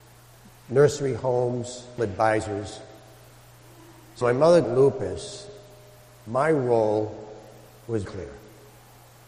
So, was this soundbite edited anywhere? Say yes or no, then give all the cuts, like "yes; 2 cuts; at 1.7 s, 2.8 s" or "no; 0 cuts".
yes; 4 cuts; at 2.0 s, 4.2 s, 4.6 s, 8.0 s